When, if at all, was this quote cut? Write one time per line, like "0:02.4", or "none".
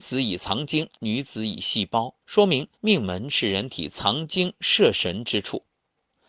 0:02.2
0:02.7